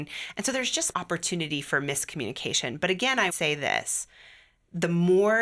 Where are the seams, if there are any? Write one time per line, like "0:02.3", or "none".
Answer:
0:00.9
0:03.3

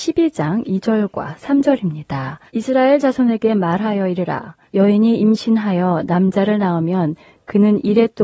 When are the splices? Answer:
0:02.5
0:04.7

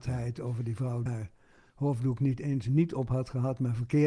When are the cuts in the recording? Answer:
0:01.1

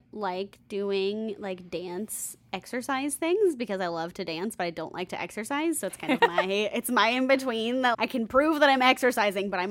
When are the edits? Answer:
0:06.2
0:07.9

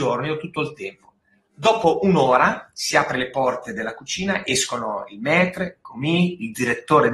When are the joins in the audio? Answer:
none

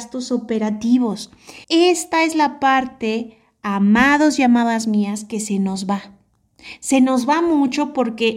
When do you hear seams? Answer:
0:01.6

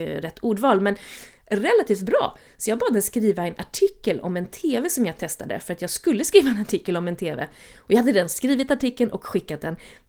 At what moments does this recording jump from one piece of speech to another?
none

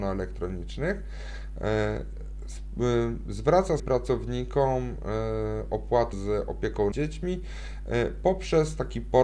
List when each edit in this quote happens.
0:03.8
0:06.1
0:06.9

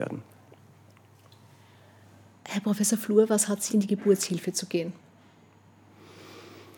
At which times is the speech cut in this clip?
0:03.7

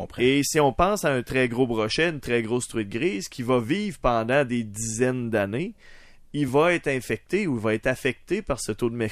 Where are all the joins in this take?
none

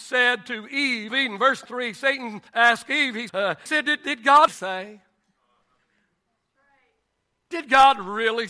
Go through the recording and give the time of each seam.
0:01.1
0:01.6
0:02.5
0:03.3
0:03.7
0:04.5

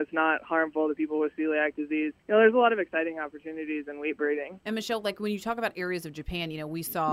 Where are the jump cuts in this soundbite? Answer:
0:02.2
0:04.6

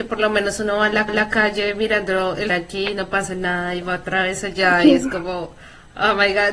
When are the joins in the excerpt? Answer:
0:01.1
0:02.5

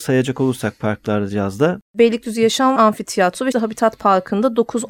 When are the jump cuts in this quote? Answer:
0:01.9
0:02.8
0:03.5

